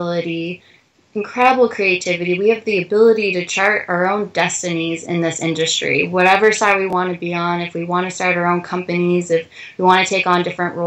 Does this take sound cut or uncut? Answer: uncut